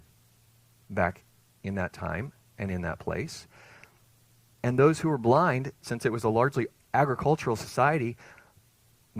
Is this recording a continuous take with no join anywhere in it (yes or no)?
yes